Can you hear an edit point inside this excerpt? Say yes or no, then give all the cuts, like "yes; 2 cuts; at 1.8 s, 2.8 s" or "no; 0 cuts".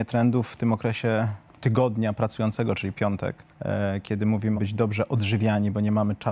yes; 4 cuts; at 1.5 s, 2.9 s, 3.5 s, 4.5 s